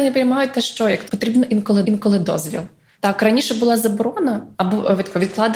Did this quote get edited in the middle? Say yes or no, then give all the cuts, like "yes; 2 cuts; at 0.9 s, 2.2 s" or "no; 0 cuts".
yes; 3 cuts; at 1.1 s, 1.8 s, 4.5 s